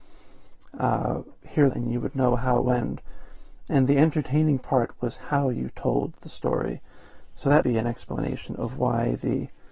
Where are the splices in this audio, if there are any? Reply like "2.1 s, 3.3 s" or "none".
1.7 s, 2.6 s, 7.6 s